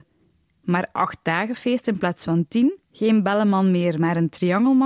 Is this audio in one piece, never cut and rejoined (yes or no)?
no